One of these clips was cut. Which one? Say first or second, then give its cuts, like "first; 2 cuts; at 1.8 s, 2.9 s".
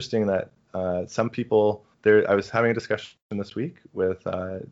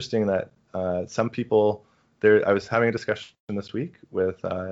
first; 1 cut; at 1.9 s